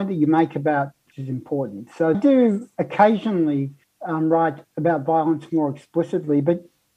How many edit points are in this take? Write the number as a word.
three